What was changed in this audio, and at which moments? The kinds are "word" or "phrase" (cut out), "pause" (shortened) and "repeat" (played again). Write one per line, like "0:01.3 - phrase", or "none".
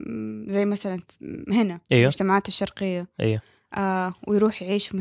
0:01.8 - pause